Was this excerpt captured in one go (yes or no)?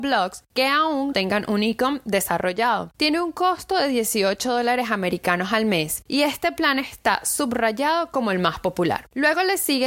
no